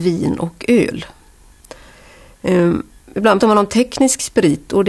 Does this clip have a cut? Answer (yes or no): yes